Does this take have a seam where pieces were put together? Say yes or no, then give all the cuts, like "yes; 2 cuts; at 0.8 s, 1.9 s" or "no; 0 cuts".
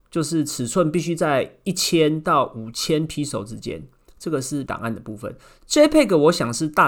yes; 1 cut; at 4.7 s